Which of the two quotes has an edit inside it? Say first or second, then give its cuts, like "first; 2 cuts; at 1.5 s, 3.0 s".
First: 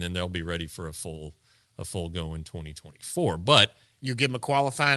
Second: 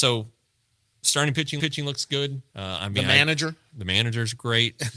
second; 2 cuts; at 1.6 s, 2.5 s